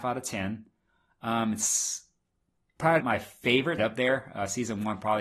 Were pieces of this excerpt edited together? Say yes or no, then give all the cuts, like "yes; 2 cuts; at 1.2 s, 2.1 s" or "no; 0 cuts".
yes; 2 cuts; at 3.0 s, 3.8 s